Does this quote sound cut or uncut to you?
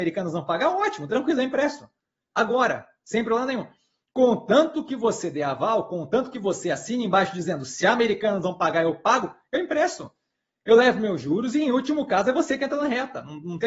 uncut